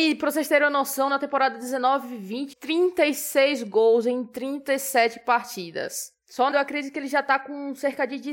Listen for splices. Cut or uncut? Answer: cut